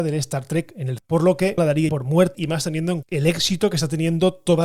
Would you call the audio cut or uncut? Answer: cut